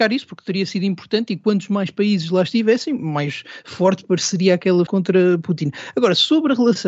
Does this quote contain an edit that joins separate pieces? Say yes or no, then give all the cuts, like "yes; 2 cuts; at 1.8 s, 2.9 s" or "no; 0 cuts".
yes; 1 cut; at 4.9 s